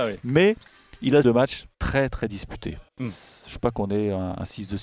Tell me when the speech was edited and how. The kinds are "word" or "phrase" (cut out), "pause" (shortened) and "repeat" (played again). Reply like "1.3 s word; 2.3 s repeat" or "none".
1.2 s phrase; 1.7 s pause; 2.9 s pause; 3.6 s word